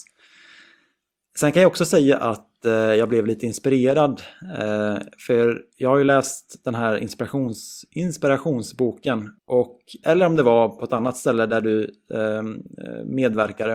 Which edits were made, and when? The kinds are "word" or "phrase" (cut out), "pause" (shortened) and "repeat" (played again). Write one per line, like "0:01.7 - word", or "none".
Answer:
0:09.4 - pause